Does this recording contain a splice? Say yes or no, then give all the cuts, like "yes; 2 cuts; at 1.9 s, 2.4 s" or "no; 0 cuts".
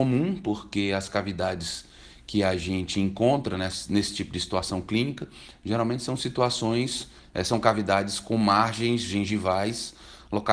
no; 0 cuts